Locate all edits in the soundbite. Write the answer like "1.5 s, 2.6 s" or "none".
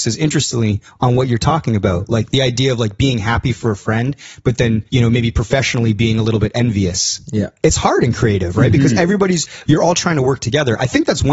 4.9 s